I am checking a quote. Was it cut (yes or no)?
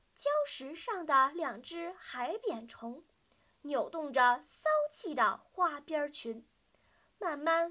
no